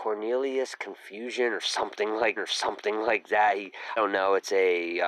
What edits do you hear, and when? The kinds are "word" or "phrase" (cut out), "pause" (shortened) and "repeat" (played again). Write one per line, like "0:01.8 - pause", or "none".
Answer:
0:02.4 - repeat
0:04.0 - word

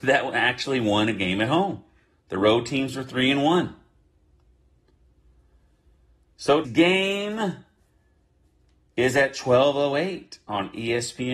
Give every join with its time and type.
0:06.6 - word

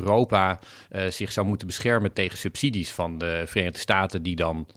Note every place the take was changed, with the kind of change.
0:02.1 - word

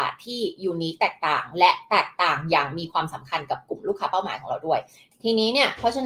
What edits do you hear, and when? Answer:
none

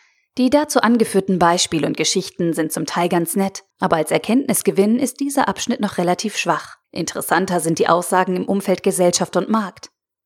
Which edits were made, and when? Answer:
0:03.7 - pause
0:06.8 - pause

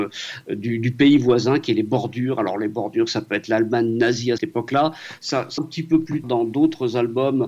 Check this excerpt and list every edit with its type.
0:04.4 - word
0:05.6 - word
0:06.2 - word

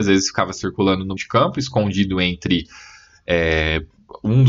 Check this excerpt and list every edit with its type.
0:01.2 - word

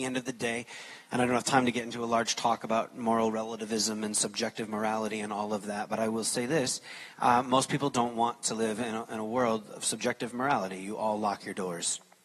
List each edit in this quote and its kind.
none

